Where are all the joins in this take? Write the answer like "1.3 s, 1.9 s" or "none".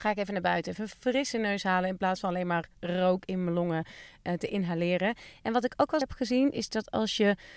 6.0 s